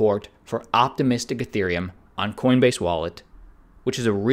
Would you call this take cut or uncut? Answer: uncut